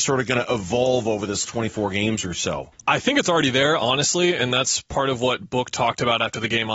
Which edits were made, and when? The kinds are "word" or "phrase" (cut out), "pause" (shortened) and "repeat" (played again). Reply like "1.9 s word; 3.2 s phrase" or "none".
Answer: 1.5 s word